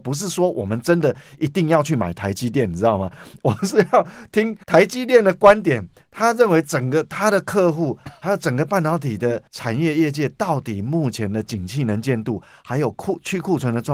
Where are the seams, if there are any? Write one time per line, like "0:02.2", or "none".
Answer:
0:04.6
0:09.5